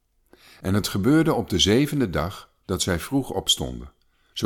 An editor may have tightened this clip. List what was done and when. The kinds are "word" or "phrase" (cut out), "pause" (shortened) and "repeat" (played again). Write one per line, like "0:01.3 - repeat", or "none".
none